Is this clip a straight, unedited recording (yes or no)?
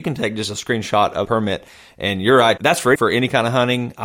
no